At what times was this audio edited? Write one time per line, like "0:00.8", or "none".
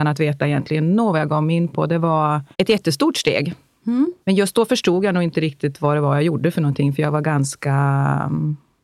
0:02.5
0:04.2